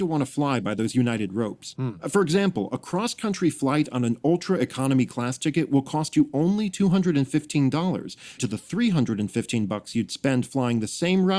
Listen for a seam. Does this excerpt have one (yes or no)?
yes